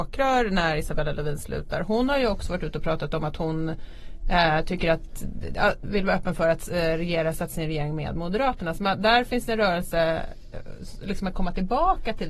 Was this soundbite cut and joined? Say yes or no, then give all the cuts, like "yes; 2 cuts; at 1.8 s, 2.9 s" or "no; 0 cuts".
no; 0 cuts